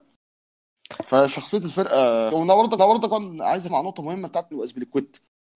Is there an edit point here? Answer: yes; 4 cuts; at 2.3 s, 2.8 s, 3.7 s, 4.5 s

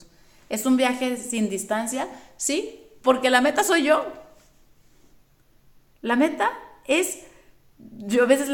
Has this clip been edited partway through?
no; 0 cuts

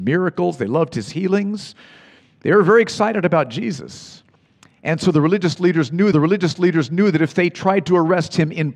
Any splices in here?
yes; 1 cut; at 6.1 s

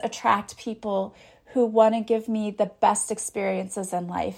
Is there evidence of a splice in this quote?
no; 0 cuts

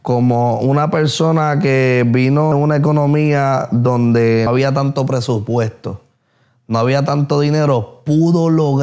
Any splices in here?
yes; 2 cuts; at 2.5 s, 4.5 s

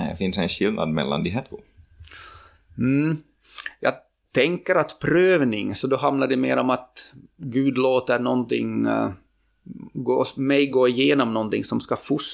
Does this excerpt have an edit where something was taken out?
no; 0 cuts

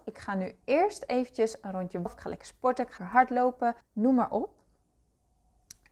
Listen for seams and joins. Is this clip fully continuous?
no; 3 cuts; at 2.1 s, 3.0 s, 3.8 s

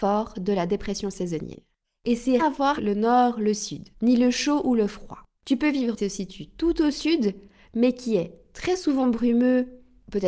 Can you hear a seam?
yes; 5 cuts; at 1.8 s, 2.4 s, 2.8 s, 3.9 s, 6.0 s

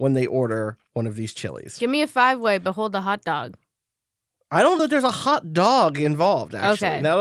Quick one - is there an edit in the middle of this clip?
yes; 1 cut; at 4.8 s

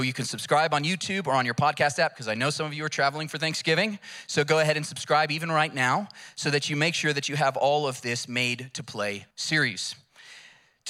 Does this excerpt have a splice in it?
yes; 1 cut; at 9.3 s

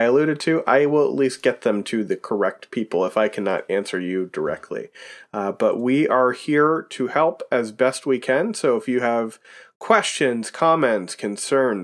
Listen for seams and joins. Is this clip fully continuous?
yes; 0 cuts

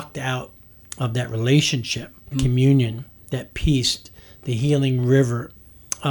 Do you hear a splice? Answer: yes; 1 cut; at 2.3 s

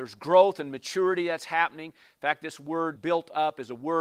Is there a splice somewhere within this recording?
yes; 1 cut; at 3.0 s

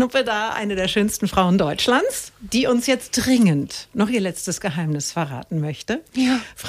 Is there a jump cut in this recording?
no; 0 cuts

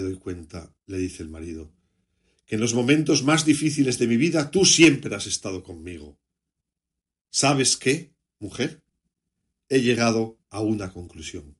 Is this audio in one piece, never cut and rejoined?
yes; 0 cuts

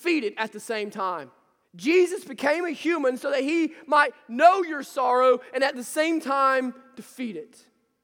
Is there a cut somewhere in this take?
yes; 1 cut; at 1.6 s

